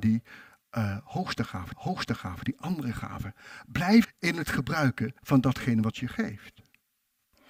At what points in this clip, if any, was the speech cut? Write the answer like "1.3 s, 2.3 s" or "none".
1.7 s, 4.0 s, 5.2 s, 5.9 s